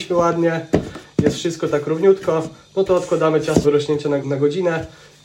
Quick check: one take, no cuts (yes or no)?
no